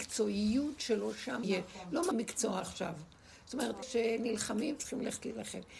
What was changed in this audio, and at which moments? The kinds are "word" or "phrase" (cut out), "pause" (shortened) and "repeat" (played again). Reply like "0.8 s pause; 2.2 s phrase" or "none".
1.4 s word; 2.1 s word; 3.8 s word